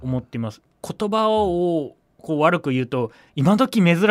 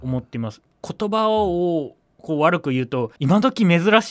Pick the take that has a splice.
second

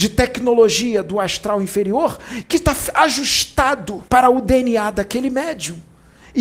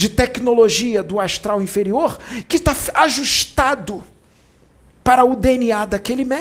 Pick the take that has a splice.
first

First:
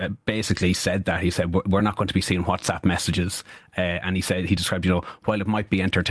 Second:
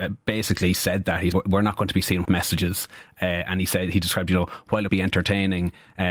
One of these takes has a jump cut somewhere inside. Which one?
second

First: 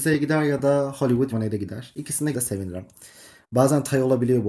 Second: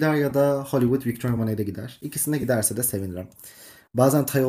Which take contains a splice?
first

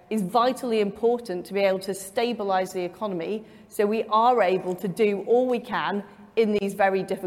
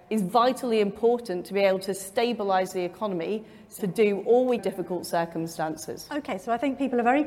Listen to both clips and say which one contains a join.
second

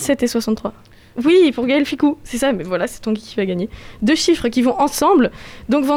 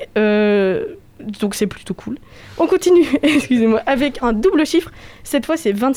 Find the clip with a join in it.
second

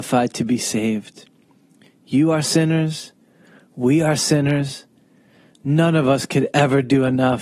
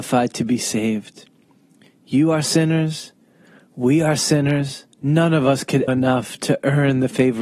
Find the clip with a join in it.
second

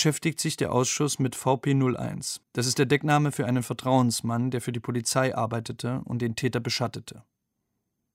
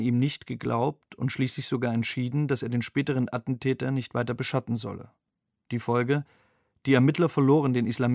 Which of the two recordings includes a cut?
first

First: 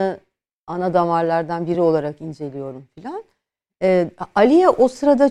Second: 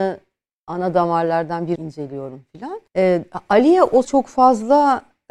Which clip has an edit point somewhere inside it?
second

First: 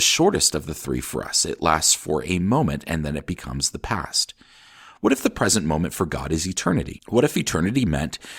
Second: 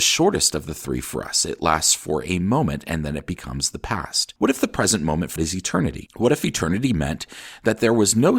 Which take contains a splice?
second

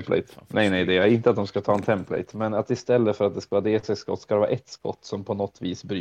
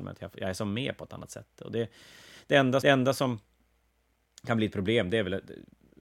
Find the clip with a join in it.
second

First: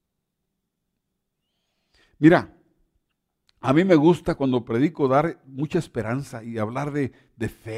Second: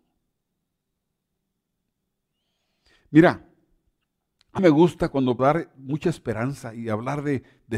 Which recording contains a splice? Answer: second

